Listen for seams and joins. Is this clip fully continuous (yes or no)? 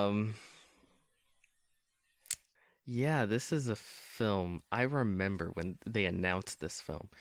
no